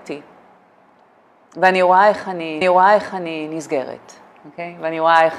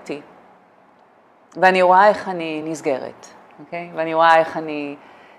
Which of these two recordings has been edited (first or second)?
first